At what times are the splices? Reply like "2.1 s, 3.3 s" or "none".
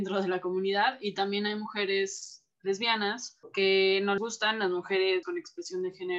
4.2 s, 5.2 s